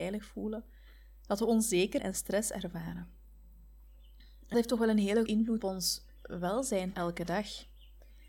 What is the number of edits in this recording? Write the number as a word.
five